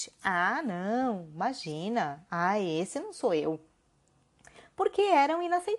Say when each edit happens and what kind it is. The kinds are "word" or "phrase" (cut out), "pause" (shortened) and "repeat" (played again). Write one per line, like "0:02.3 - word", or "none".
none